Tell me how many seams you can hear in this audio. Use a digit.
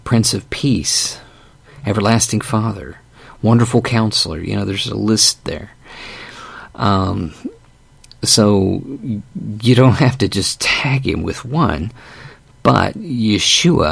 0